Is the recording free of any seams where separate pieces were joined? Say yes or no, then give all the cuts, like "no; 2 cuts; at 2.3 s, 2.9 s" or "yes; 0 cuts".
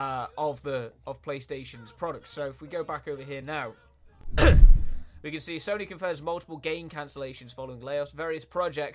yes; 0 cuts